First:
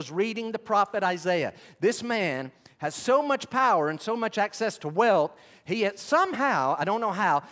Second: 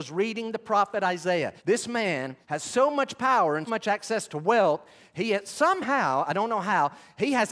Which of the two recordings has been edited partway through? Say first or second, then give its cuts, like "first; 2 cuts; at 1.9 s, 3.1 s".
second; 3 cuts; at 1.6 s, 2.4 s, 3.7 s